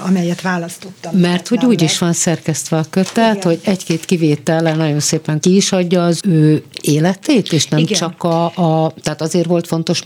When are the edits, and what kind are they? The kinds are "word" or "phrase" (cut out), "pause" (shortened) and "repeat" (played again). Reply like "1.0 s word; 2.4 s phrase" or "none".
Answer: 5.4 s phrase; 6.2 s word